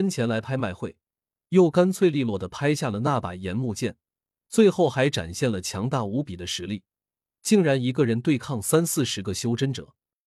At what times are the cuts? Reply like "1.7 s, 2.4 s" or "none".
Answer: none